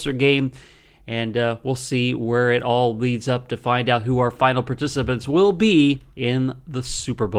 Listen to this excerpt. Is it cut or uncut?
cut